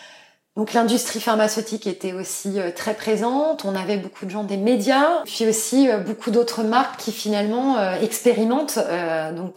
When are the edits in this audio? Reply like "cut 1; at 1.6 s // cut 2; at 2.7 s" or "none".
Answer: none

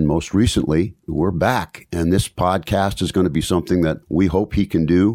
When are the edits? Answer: cut 1; at 1.0 s // cut 2; at 4.0 s

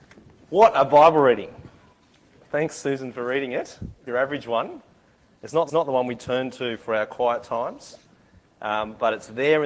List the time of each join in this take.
cut 1; at 4.1 s // cut 2; at 5.7 s

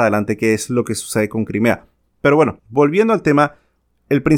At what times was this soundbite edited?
none

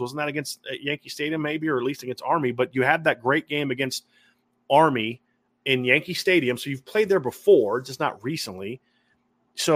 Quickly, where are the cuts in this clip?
none

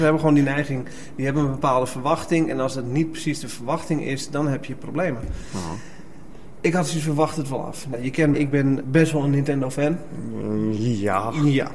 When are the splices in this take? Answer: cut 1; at 8.3 s // cut 2; at 8.8 s

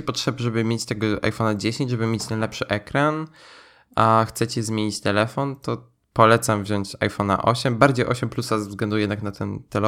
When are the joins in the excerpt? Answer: none

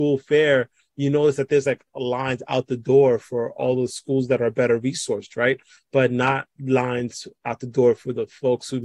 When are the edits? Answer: none

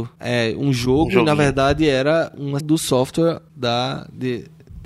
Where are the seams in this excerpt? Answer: cut 1; at 2.6 s

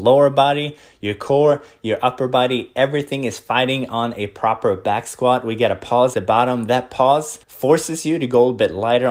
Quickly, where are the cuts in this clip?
cut 1; at 6.1 s // cut 2; at 7.4 s

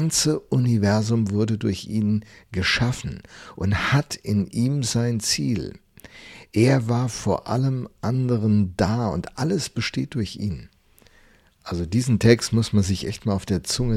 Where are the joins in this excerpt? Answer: none

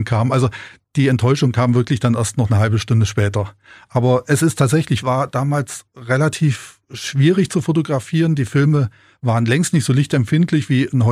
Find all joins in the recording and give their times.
cut 1; at 5.0 s

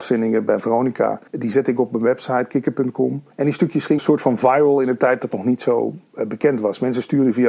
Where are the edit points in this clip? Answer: cut 1; at 1.3 s // cut 2; at 3.3 s // cut 3; at 4.0 s // cut 4; at 5.3 s // cut 5; at 6.1 s

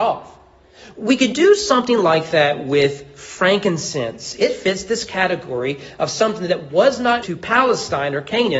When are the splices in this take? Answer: cut 1; at 7.2 s

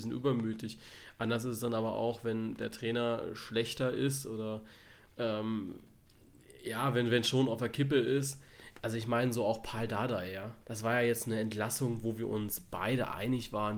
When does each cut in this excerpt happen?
cut 1; at 10.6 s

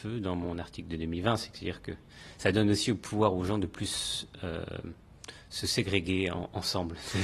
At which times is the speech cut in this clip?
none

